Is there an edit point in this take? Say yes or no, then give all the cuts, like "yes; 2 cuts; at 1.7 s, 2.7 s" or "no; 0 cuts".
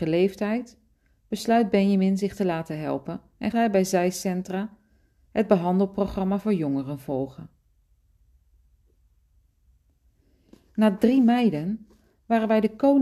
yes; 1 cut; at 3.5 s